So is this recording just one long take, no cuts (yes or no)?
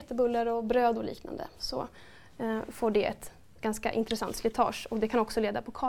yes